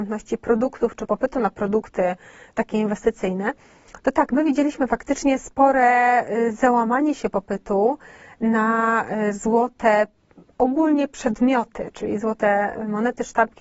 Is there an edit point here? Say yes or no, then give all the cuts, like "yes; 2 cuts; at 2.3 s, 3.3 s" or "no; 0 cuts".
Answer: no; 0 cuts